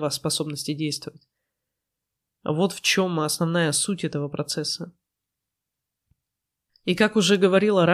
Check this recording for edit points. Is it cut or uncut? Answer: uncut